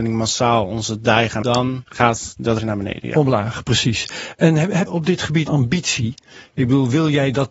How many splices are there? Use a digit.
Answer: 5